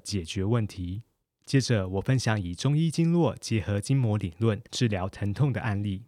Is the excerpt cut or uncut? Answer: cut